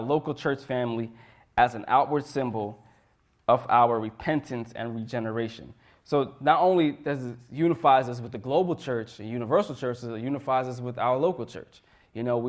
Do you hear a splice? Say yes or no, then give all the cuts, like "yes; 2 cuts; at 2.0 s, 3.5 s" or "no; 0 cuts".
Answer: no; 0 cuts